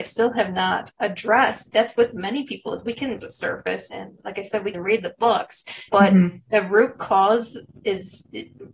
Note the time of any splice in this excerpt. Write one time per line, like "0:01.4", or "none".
0:01.7
0:03.2
0:03.9
0:04.7
0:05.9